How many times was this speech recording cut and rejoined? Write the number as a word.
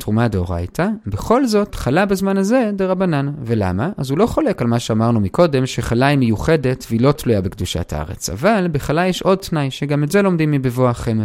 zero